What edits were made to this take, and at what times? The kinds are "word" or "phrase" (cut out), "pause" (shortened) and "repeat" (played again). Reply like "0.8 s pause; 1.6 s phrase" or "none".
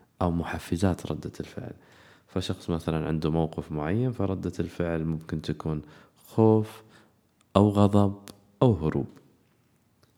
none